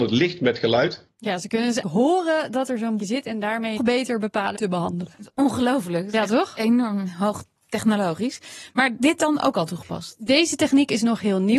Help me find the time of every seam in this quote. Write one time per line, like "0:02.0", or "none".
0:01.8
0:03.0
0:03.8
0:04.5
0:09.0